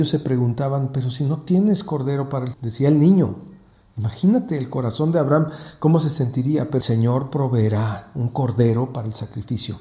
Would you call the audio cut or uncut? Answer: cut